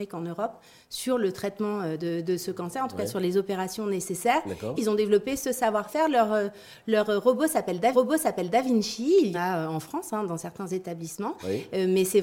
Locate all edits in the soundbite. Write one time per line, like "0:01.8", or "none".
0:04.8
0:07.9
0:09.3